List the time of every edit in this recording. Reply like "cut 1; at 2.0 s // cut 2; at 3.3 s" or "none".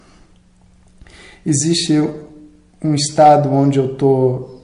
none